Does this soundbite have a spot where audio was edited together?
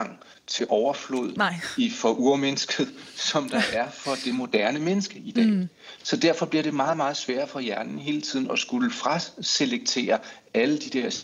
no; 0 cuts

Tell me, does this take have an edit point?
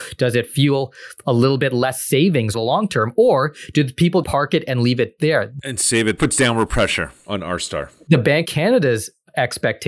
yes; 4 cuts; at 2.5 s, 4.2 s, 6.2 s, 8.4 s

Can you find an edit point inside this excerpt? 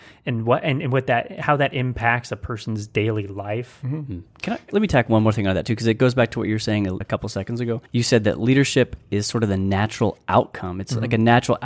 yes; 3 cuts; at 4.7 s, 7.0 s, 7.9 s

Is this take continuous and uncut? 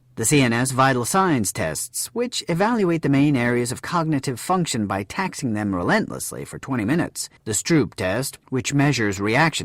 no; 1 cut; at 7.4 s

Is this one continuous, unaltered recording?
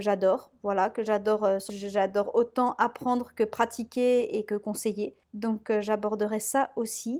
no; 2 cuts; at 1.7 s, 5.2 s

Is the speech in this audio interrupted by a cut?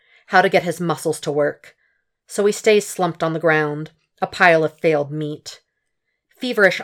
no; 0 cuts

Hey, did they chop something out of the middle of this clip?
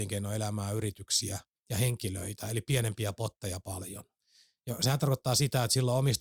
no; 0 cuts

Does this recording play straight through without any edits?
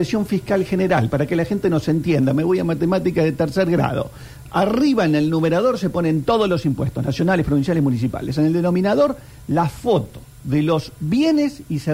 yes; 0 cuts

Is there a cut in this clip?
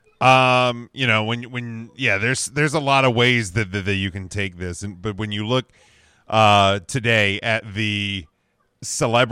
no; 0 cuts

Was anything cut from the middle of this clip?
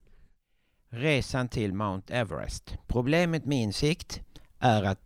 yes; 1 cut; at 2.8 s

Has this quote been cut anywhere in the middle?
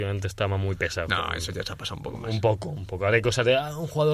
no; 0 cuts

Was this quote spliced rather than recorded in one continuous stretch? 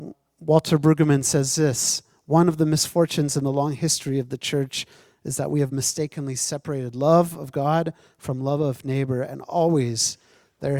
no; 0 cuts

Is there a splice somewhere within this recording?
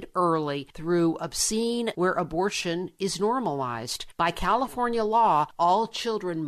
yes; 1 cut; at 1.9 s

